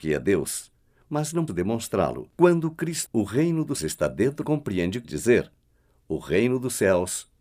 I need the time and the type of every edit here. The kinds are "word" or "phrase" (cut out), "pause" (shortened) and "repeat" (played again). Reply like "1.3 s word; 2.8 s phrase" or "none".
1.5 s word; 2.3 s pause; 3.1 s word; 3.8 s word; 4.4 s phrase; 5.0 s word

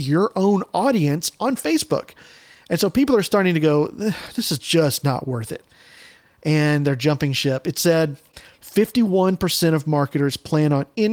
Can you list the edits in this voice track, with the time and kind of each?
none

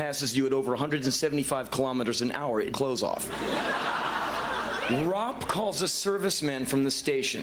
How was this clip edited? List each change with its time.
2.7 s phrase

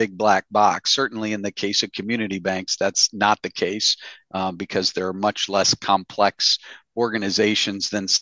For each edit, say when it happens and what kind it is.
none

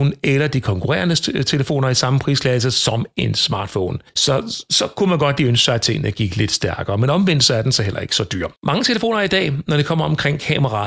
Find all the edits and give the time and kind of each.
8.6 s pause

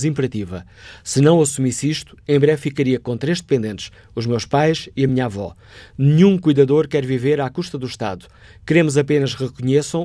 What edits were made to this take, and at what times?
none

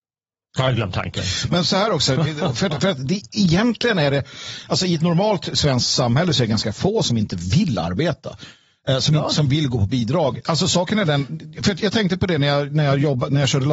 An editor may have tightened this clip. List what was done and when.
none

